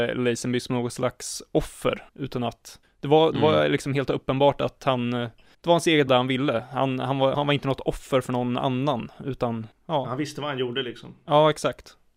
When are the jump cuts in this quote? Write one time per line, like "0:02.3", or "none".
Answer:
0:02.1
0:02.8
0:05.5
0:06.1
0:07.3
0:09.7